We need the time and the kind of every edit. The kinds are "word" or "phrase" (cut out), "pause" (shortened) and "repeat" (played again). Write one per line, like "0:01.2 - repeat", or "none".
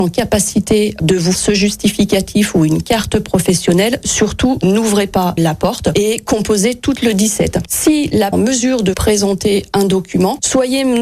0:01.3 - word
0:05.4 - word
0:07.0 - word
0:08.3 - phrase
0:08.9 - word